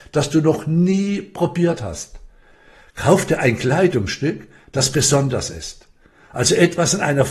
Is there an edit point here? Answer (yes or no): no